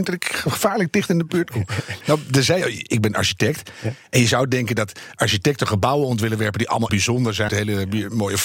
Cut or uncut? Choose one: cut